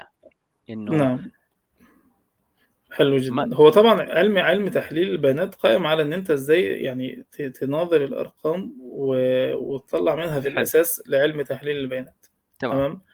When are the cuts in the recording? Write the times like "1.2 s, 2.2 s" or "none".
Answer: 10.4 s